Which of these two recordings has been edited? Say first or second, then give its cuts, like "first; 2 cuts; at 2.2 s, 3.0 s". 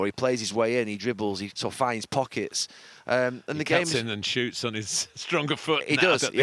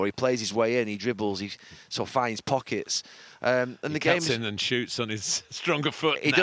first; 1 cut; at 1.5 s